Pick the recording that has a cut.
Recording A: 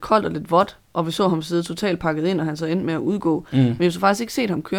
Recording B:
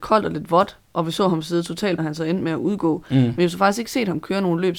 B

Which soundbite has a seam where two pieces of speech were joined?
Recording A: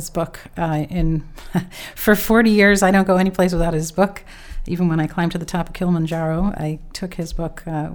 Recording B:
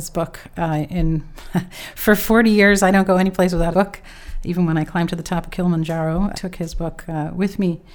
B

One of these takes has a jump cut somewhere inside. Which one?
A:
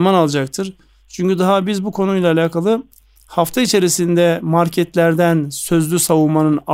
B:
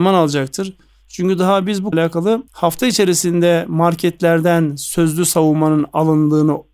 B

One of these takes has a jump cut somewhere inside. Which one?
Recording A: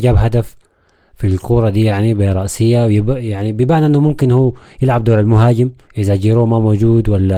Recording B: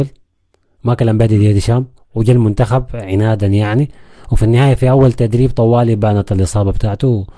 A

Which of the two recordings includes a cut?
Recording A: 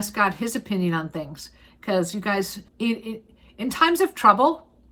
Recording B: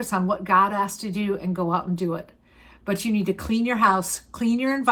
A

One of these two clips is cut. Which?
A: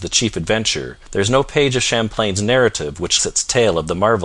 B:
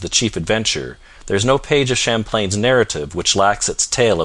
A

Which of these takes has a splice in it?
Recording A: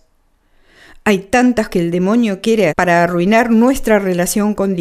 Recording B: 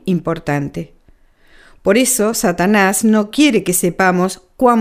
A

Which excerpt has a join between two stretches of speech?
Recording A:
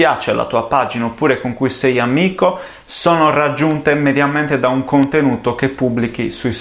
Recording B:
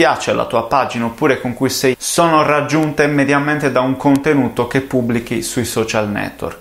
B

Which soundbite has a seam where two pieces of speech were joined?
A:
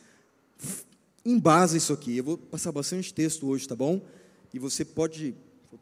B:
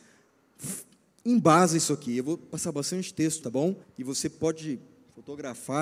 B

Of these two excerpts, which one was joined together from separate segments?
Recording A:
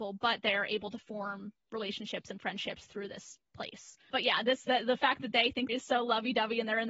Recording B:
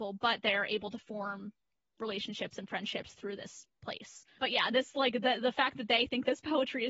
A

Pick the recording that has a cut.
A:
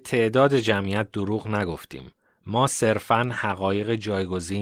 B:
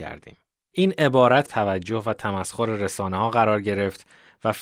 B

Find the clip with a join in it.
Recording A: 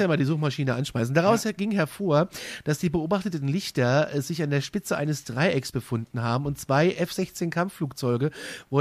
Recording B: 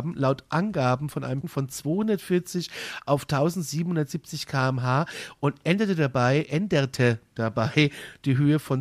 B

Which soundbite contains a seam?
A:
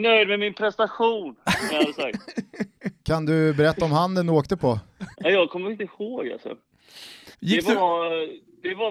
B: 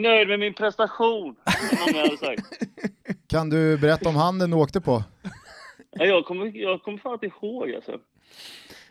A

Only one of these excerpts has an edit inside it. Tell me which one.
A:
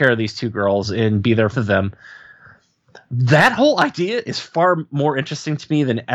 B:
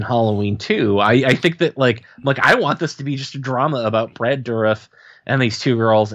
A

